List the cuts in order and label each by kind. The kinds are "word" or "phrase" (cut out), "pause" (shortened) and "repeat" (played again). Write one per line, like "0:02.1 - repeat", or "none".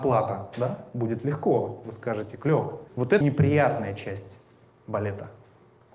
0:02.9 - pause
0:03.2 - word